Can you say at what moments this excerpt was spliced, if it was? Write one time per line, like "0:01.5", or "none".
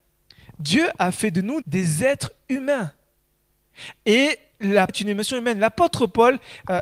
0:01.6
0:04.9